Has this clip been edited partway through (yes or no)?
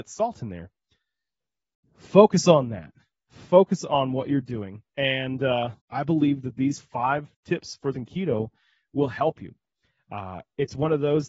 yes